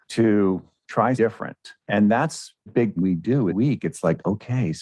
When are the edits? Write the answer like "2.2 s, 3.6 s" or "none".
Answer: 1.2 s, 1.8 s, 2.7 s, 3.0 s, 3.5 s